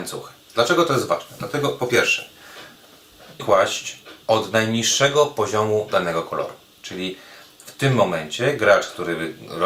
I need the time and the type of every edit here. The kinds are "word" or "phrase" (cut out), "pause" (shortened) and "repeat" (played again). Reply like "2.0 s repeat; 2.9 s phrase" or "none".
3.4 s word; 4.2 s pause